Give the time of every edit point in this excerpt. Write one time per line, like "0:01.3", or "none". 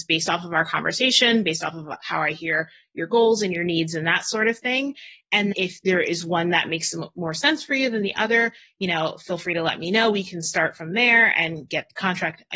0:05.5